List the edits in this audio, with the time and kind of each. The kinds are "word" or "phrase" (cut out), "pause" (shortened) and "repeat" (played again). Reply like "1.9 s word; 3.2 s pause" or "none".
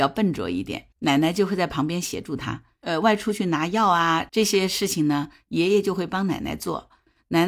0.9 s pause

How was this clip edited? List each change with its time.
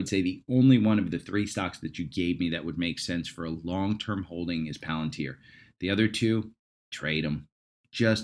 none

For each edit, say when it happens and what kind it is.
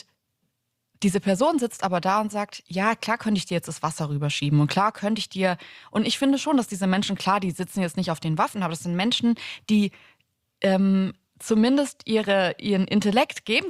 none

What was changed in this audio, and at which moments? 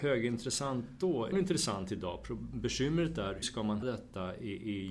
1.3 s phrase; 3.4 s word; 3.8 s word

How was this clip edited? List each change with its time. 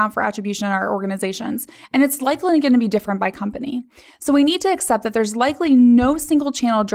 none

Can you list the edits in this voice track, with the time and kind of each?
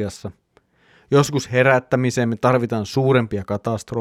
none

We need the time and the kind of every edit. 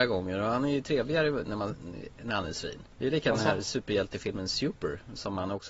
none

